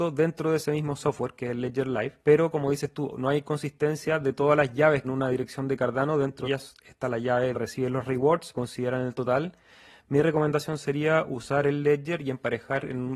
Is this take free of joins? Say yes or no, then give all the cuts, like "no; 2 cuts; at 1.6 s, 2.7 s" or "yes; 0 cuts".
no; 5 cuts; at 2.2 s, 5.0 s, 6.4 s, 7.5 s, 8.5 s